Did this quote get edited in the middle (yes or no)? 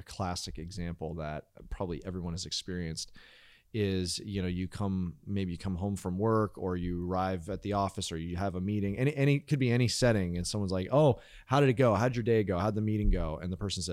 no